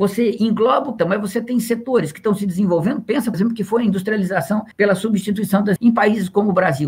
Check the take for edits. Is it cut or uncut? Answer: cut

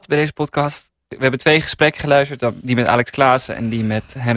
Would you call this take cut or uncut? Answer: uncut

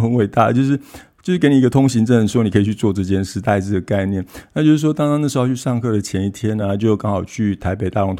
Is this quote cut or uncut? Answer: uncut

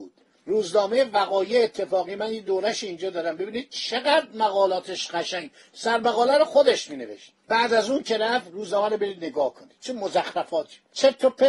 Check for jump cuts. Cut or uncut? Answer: uncut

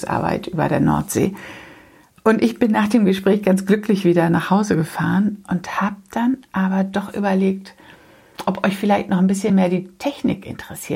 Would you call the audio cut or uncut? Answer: uncut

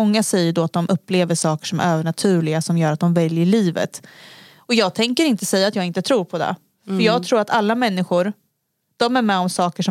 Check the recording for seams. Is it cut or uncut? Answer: uncut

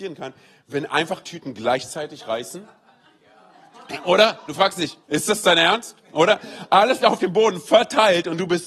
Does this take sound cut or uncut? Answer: cut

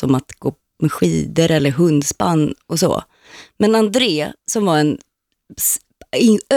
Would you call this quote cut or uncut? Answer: uncut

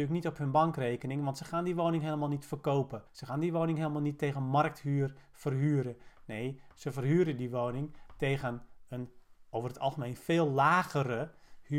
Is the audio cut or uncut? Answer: cut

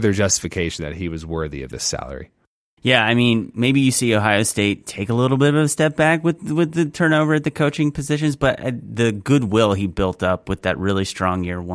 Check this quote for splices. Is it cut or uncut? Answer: cut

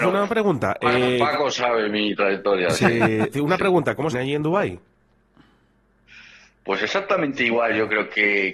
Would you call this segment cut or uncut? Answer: cut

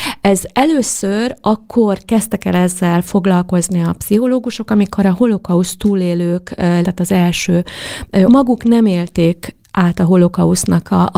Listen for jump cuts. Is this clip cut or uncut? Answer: cut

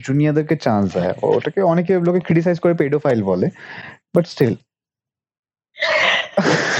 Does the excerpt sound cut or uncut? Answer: uncut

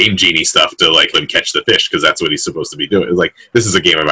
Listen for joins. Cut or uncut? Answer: cut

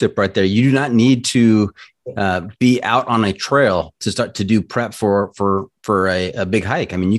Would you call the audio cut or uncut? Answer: uncut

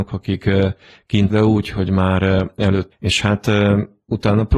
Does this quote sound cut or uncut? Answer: cut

